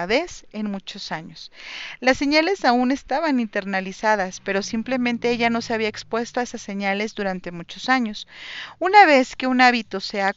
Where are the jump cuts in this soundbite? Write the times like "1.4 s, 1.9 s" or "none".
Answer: none